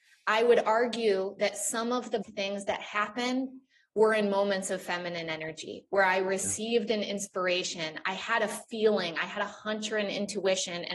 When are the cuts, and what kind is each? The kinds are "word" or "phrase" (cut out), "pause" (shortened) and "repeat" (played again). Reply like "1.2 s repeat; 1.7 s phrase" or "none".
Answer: 2.2 s word

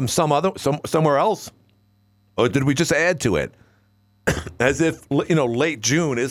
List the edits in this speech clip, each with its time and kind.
none

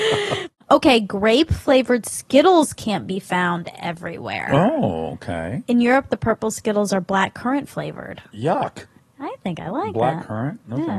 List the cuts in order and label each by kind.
9.0 s pause

